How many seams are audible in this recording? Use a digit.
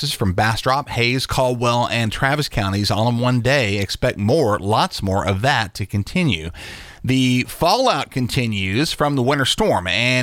0